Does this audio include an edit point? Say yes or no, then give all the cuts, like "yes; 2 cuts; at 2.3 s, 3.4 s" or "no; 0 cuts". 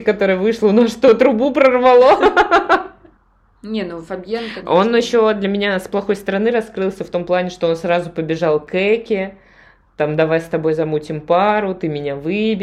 no; 0 cuts